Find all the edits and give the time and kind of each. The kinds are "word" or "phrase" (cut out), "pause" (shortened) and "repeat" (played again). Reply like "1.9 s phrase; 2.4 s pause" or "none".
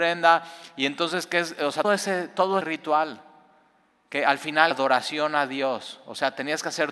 1.8 s word; 2.6 s word; 4.7 s word